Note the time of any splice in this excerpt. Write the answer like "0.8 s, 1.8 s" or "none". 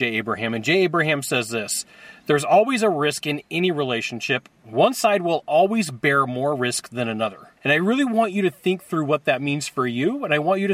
7.6 s